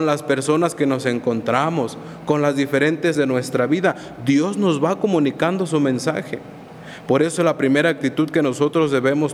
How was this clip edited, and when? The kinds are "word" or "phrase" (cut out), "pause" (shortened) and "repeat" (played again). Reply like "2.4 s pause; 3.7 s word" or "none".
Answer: 3.1 s word